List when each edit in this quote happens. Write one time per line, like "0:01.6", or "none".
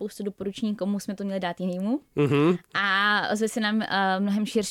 none